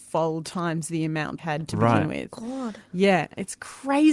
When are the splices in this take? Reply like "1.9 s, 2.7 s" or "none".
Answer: 1.4 s